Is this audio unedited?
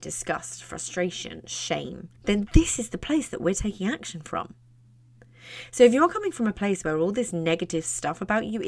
no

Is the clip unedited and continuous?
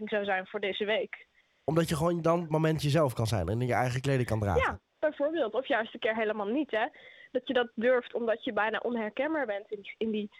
yes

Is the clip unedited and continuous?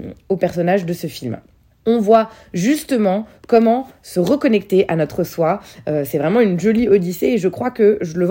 no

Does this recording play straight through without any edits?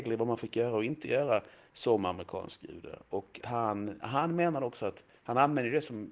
no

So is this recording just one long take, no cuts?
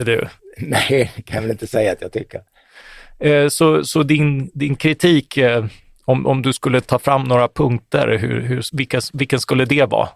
yes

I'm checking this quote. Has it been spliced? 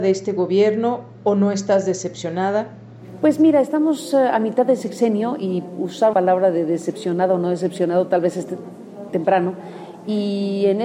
yes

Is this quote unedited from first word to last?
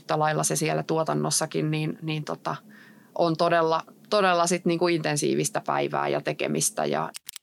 yes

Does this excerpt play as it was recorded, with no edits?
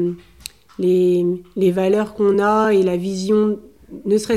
yes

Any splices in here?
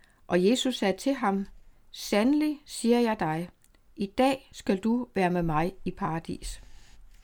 no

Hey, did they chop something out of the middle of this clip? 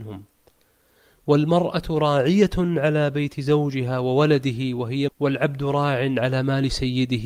yes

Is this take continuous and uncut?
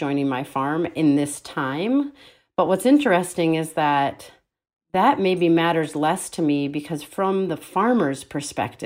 yes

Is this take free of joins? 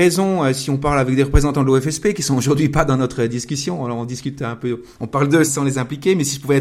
no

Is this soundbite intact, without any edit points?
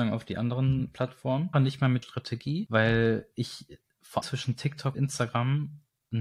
no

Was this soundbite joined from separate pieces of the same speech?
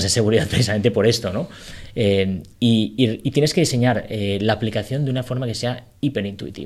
yes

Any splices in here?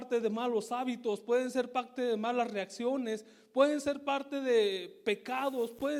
no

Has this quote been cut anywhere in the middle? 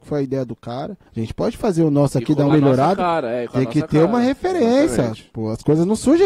yes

